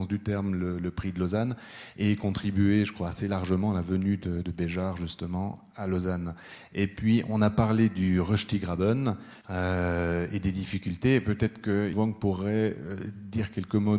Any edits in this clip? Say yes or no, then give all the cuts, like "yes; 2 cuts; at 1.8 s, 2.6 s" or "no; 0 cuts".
yes; 3 cuts; at 4.4 s, 9.4 s, 11.9 s